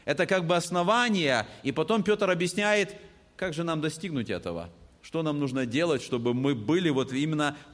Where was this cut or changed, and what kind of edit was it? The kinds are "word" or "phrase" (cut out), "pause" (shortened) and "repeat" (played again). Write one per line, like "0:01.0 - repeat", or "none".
none

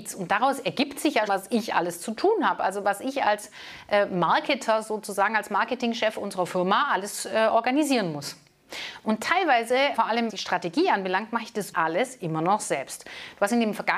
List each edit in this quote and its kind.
0:01.3 - word
0:09.9 - word
0:10.3 - word
0:11.7 - word

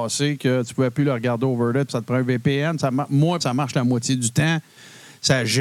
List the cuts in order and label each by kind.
0:01.9 - word
0:03.4 - word

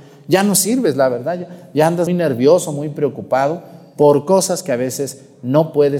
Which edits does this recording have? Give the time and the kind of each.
0:02.1 - word

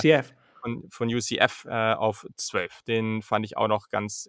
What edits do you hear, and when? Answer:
none

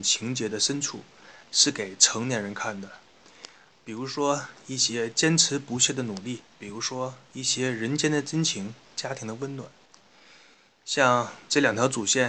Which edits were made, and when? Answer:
0:06.5 - pause

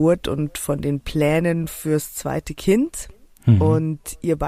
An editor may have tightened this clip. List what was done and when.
none

